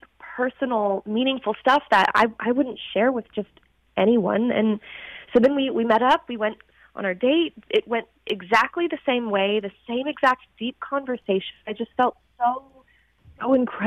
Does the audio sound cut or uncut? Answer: uncut